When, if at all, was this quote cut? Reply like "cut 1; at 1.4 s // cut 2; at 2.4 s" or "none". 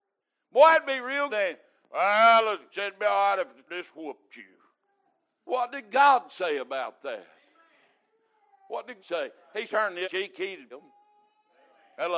cut 1; at 1.3 s // cut 2; at 2.7 s // cut 3; at 3.7 s // cut 4; at 5.5 s // cut 5; at 9.0 s // cut 6; at 9.7 s // cut 7; at 10.0 s // cut 8; at 10.7 s